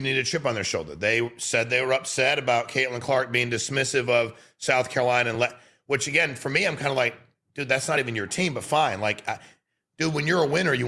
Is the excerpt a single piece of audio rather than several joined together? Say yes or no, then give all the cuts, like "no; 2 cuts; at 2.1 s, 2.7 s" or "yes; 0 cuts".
yes; 0 cuts